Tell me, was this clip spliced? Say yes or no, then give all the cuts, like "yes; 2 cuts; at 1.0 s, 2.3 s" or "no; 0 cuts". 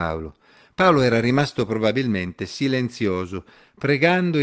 no; 0 cuts